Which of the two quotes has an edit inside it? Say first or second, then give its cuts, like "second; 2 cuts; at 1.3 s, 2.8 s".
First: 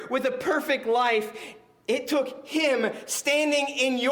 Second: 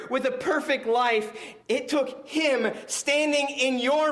second; 1 cut; at 1.6 s